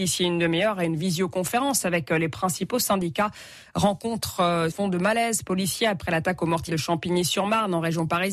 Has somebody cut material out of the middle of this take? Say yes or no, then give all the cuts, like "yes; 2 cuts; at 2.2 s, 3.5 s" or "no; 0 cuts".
yes; 2 cuts; at 4.7 s, 6.7 s